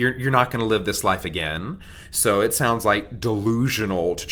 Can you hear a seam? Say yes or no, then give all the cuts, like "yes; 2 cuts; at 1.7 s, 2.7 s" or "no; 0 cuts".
no; 0 cuts